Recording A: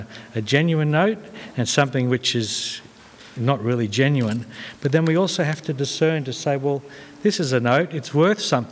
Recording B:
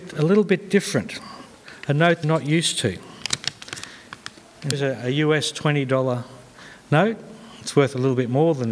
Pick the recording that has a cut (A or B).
B